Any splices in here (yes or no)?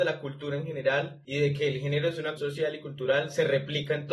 yes